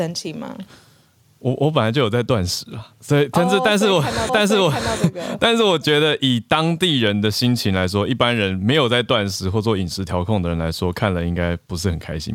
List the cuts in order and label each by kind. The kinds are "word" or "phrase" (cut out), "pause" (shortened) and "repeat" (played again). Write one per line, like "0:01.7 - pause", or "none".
0:04.3 - repeat